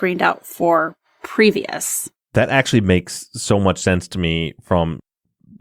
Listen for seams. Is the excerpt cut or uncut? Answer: cut